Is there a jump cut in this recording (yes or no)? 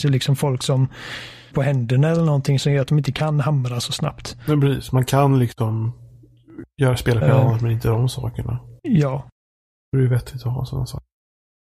yes